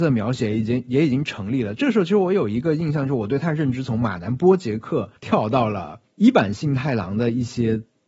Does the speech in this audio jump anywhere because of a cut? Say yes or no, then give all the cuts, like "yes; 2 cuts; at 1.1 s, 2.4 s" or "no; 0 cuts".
yes; 2 cuts; at 5.2 s, 6.1 s